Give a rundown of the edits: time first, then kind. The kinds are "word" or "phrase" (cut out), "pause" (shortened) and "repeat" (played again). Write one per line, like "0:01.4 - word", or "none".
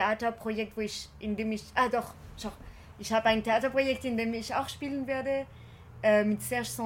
none